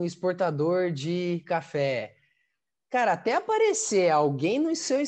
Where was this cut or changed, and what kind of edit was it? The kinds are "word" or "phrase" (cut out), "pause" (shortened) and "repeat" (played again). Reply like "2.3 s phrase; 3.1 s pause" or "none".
none